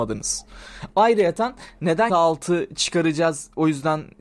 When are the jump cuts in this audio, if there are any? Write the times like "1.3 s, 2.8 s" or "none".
2.1 s